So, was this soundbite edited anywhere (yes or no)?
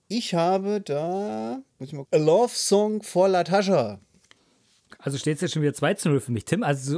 yes